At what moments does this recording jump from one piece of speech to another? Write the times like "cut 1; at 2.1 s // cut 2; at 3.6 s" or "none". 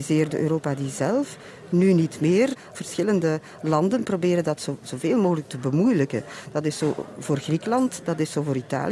none